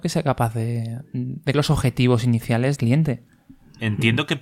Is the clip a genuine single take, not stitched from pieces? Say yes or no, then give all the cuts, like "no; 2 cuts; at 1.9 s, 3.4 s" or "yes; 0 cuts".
no; 2 cuts; at 1.5 s, 2.8 s